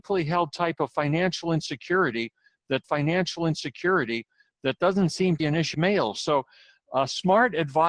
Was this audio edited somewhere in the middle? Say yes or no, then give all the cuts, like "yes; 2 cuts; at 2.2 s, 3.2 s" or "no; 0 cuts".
yes; 3 cuts; at 2.8 s, 5.4 s, 5.7 s